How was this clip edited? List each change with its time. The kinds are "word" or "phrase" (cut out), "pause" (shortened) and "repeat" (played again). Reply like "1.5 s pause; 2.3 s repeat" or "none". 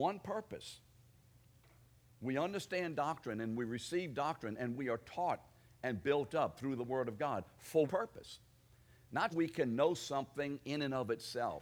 7.9 s word; 9.3 s word